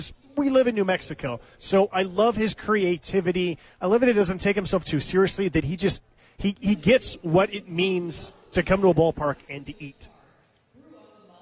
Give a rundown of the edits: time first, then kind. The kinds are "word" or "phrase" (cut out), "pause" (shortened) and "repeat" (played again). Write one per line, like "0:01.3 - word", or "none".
none